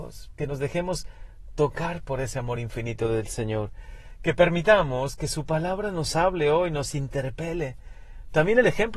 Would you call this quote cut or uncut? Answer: uncut